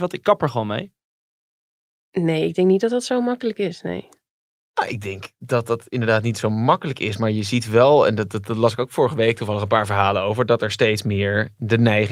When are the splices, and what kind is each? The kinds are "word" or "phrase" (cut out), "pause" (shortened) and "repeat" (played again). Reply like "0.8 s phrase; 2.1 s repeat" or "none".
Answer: none

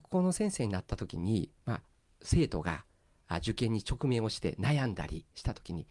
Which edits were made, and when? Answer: 1.6 s pause

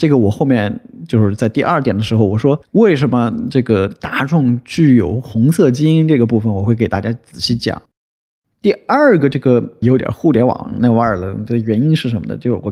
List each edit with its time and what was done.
none

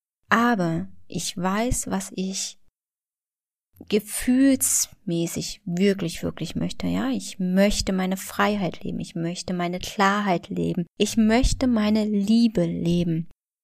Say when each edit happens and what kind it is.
10.9 s pause

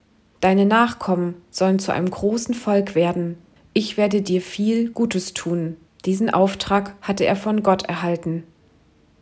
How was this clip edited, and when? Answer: 3.6 s pause; 5.9 s pause

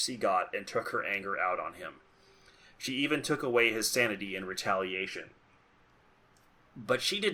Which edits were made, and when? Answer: none

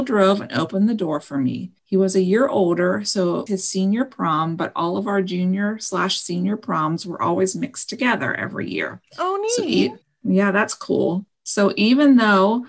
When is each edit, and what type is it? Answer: 3.5 s word; 10.0 s pause

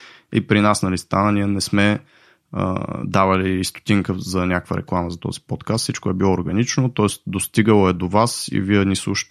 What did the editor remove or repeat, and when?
none

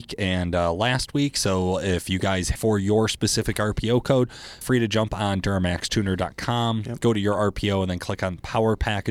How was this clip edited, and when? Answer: 2.6 s phrase; 4.6 s word

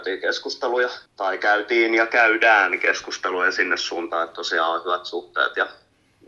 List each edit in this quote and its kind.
1.1 s pause

